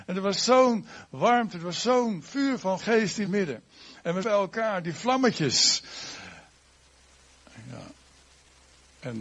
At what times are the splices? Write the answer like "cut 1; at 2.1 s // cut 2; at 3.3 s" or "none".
cut 1; at 2.8 s // cut 2; at 3.3 s // cut 3; at 4.2 s